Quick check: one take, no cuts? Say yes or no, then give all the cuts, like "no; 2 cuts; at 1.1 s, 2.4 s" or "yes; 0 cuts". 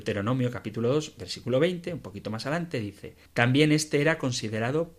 no; 1 cut; at 3.3 s